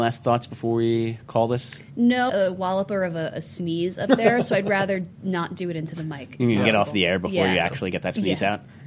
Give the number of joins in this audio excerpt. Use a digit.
1